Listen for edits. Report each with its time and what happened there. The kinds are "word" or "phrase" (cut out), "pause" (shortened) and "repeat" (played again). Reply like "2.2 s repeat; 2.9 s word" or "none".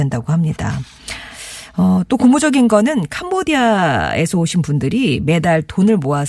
none